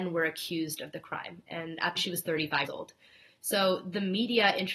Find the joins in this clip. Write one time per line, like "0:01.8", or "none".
0:02.0
0:02.7